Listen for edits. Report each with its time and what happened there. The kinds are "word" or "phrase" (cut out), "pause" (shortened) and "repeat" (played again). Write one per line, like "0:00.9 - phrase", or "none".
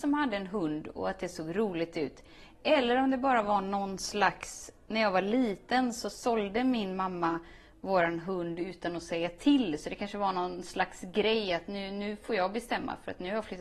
none